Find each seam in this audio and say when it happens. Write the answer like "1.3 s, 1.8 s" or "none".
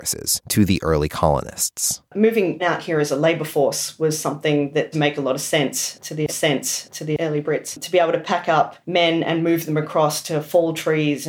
2.6 s, 4.9 s, 6.3 s, 8.8 s